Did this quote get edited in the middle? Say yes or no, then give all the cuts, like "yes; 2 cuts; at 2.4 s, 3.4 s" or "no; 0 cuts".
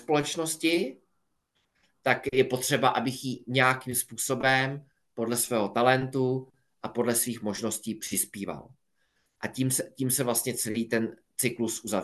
no; 0 cuts